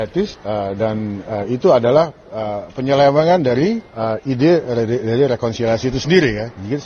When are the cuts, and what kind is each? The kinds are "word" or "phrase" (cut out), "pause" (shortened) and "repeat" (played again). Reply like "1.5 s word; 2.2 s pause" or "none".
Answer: none